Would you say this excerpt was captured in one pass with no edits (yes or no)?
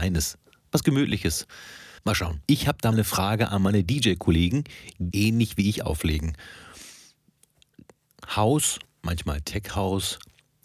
no